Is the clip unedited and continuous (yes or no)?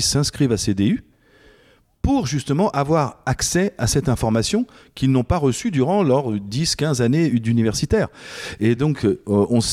yes